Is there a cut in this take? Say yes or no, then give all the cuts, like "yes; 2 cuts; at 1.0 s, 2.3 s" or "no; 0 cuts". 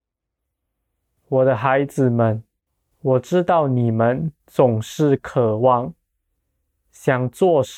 yes; 2 cuts; at 2.7 s, 4.4 s